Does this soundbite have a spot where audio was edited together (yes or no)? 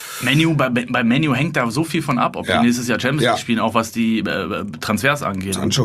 no